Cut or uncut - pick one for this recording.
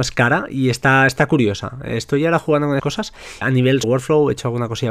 cut